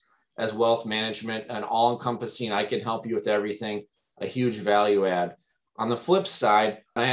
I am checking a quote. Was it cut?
no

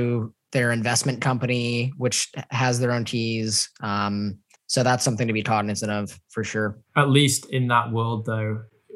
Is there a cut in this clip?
yes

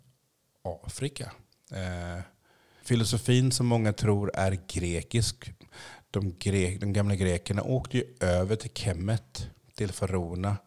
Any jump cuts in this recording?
no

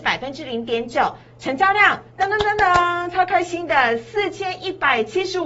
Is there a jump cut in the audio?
yes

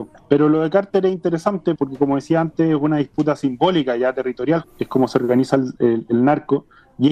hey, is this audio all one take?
no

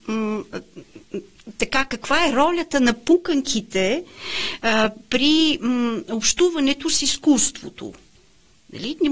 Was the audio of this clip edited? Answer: no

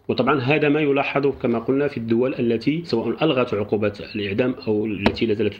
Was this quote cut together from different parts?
no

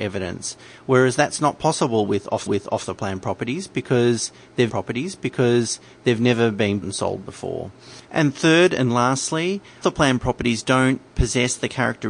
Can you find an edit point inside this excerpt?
yes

